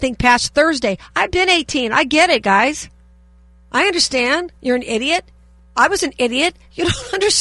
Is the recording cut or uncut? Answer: cut